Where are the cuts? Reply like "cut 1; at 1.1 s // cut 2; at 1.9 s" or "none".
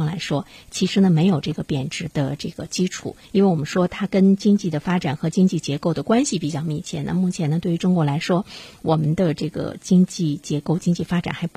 cut 1; at 3.2 s